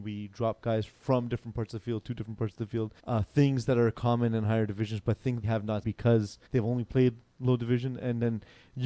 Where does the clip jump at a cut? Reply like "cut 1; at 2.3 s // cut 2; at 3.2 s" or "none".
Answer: cut 1; at 3.0 s // cut 2; at 5.4 s // cut 3; at 5.8 s // cut 4; at 6.5 s